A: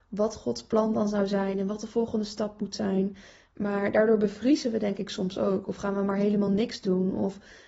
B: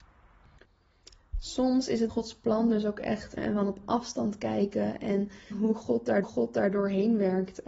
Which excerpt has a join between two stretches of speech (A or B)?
B